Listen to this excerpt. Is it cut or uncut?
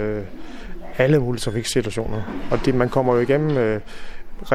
uncut